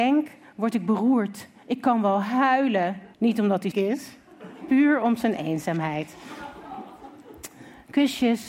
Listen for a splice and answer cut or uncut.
cut